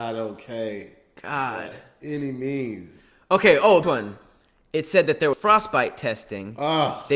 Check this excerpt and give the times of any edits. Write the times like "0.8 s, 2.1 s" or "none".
3.8 s, 5.3 s